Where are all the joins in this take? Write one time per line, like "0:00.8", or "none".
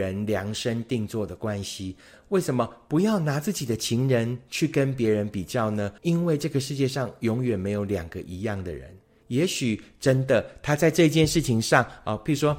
0:06.0
0:09.0